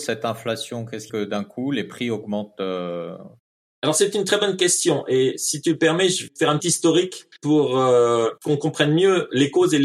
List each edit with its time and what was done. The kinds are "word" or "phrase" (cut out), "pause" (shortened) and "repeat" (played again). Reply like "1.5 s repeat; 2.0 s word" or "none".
1.1 s word; 3.4 s pause; 6.3 s word; 6.6 s word; 7.4 s pause; 8.4 s pause